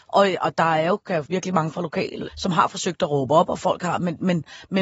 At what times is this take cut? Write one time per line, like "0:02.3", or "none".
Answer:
0:01.3
0:02.3